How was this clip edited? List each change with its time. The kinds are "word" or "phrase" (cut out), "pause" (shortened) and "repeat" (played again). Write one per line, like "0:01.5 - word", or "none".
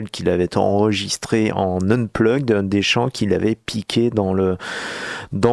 none